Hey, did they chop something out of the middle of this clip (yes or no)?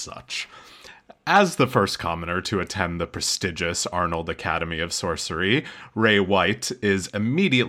no